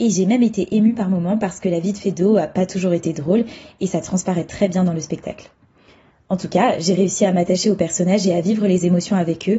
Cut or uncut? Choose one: uncut